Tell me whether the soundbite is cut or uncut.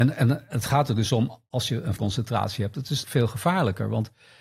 cut